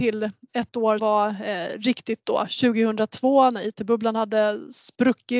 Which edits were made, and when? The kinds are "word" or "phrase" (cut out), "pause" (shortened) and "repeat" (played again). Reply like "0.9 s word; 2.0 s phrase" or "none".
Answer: 1.0 s word; 2.2 s word